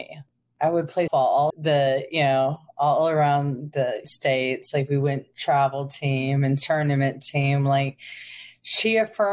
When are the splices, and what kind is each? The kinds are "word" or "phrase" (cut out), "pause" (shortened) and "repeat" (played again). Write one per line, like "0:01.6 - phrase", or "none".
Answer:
0:01.1 - word
0:01.5 - word
0:04.0 - word